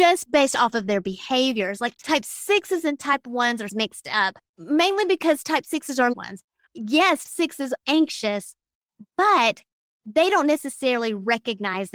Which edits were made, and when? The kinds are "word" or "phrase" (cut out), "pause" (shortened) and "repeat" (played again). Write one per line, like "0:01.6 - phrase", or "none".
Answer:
0:03.7 - word
0:04.5 - pause
0:06.1 - phrase
0:07.2 - word
0:07.8 - word